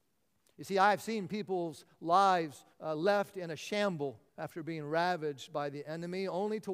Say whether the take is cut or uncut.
cut